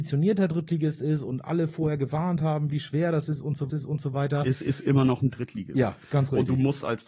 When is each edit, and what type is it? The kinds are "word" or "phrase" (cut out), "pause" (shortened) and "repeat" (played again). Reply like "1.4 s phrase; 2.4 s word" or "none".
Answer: 3.7 s repeat